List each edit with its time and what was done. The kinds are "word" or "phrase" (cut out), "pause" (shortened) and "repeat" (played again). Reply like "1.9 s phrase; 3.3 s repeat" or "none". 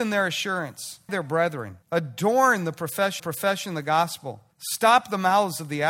1.1 s word; 1.8 s pause; 3.2 s repeat; 4.5 s pause